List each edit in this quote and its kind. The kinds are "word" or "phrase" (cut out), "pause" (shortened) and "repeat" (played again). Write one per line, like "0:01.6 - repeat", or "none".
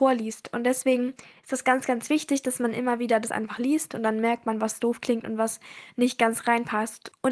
none